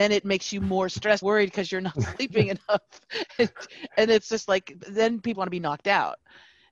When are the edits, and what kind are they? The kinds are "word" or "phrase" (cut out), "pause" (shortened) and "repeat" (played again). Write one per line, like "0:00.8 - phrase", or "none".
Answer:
0:01.2 - word
0:04.1 - word
0:05.3 - word